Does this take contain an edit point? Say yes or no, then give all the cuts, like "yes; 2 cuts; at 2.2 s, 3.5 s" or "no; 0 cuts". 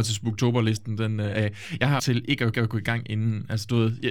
yes; 2 cuts; at 2.0 s, 2.5 s